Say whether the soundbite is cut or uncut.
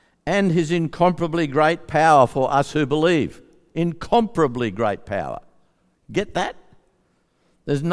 uncut